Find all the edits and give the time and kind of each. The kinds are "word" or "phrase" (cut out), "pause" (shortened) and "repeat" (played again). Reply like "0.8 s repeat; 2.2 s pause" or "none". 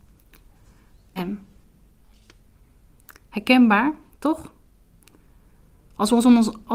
1.2 s phrase